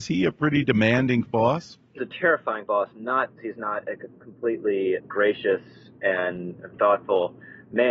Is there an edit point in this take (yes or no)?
yes